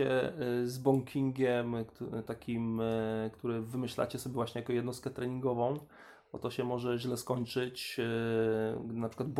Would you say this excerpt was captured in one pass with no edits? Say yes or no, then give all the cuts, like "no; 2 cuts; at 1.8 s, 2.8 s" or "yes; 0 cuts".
yes; 0 cuts